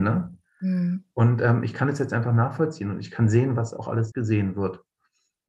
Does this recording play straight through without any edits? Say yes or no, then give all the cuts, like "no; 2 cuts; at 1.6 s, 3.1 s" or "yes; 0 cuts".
no; 1 cut; at 4.1 s